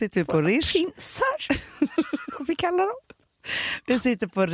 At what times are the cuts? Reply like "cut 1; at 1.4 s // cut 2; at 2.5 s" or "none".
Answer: none

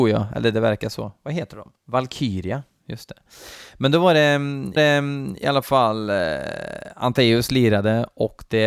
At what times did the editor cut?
cut 1; at 1.8 s // cut 2; at 4.8 s

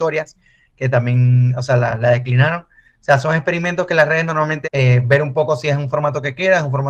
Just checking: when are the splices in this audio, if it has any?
cut 1; at 4.6 s

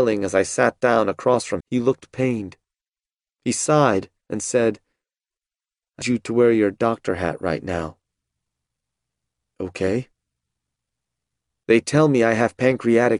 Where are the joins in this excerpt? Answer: cut 1; at 1.6 s // cut 2; at 6.0 s

